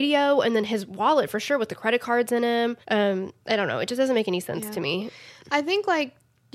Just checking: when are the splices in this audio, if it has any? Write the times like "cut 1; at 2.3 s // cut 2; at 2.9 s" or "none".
cut 1; at 2.8 s

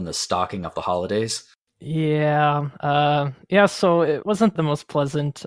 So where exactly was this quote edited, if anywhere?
cut 1; at 4.2 s // cut 2; at 4.6 s

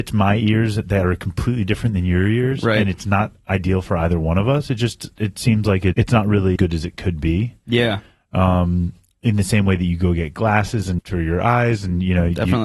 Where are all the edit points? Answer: cut 1; at 5.9 s // cut 2; at 6.6 s // cut 3; at 11.0 s

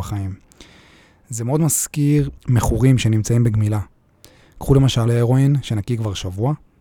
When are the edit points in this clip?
cut 1; at 2.4 s // cut 2; at 5.1 s

